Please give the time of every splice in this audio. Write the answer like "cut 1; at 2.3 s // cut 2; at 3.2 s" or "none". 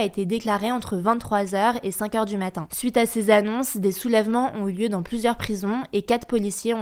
none